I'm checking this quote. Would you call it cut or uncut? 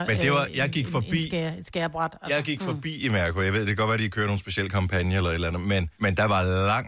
cut